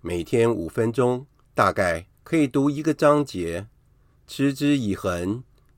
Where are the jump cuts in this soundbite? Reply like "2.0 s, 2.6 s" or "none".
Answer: 1.4 s, 2.1 s